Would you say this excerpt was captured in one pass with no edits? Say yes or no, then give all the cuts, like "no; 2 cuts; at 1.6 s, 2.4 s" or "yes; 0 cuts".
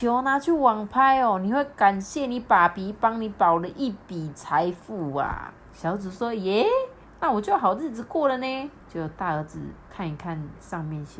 no; 2 cuts; at 5.6 s, 8.8 s